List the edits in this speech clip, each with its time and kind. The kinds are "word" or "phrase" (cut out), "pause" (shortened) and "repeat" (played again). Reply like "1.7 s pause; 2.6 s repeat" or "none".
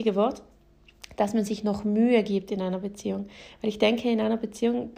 none